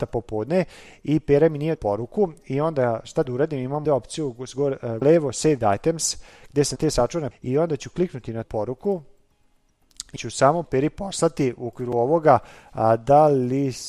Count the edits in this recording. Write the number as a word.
nine